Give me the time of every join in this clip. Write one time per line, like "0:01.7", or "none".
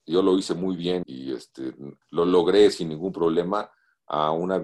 0:01.0
0:02.0